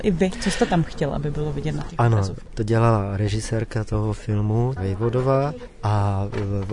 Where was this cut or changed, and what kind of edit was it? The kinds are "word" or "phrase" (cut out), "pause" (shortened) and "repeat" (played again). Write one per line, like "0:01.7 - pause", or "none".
0:04.8 - word